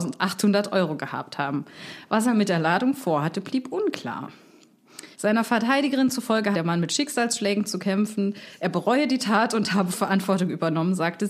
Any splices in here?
yes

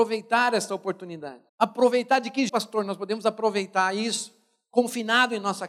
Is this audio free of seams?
no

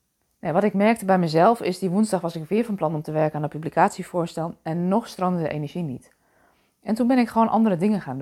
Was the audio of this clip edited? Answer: no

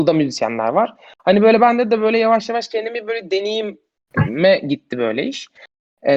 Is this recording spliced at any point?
no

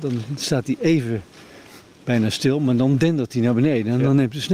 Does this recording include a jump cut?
no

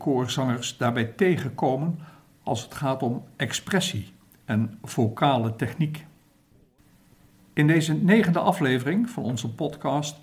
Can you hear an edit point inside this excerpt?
no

